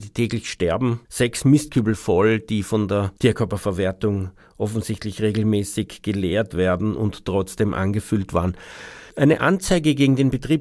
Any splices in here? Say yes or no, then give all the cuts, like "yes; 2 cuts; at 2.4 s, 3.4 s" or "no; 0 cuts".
yes; 3 cuts; at 1.0 s, 3.2 s, 9.1 s